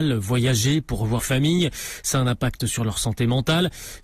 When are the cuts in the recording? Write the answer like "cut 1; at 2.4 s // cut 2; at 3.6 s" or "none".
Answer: cut 1; at 1.2 s // cut 2; at 2.6 s